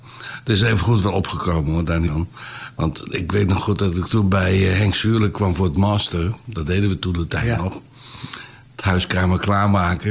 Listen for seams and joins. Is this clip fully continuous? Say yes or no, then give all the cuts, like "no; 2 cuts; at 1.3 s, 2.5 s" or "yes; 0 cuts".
yes; 0 cuts